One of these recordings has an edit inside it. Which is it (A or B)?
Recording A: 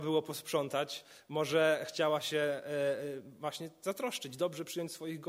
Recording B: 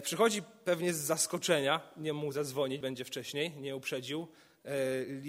B